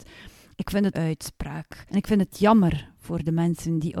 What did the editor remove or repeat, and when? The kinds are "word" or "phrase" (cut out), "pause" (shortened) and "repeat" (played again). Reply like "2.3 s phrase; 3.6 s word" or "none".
0.9 s phrase; 1.9 s pause